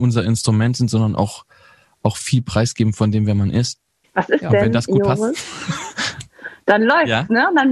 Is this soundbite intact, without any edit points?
yes; 0 cuts

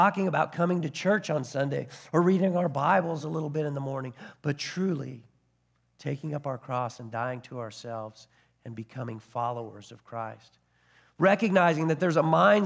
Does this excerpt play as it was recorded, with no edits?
yes; 0 cuts

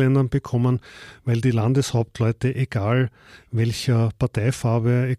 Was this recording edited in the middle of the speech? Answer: no; 0 cuts

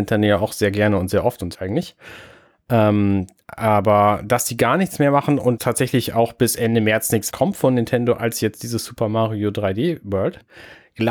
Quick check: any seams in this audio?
yes; 3 cuts; at 1.5 s, 5.6 s, 7.3 s

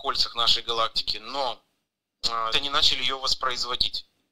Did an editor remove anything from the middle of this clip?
yes; 1 cut; at 2.5 s

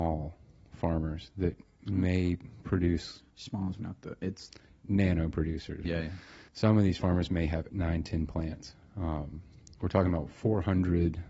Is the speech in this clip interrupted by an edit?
yes; 6 cuts; at 3.3 s, 3.8 s, 4.7 s, 5.8 s, 6.5 s, 7.7 s

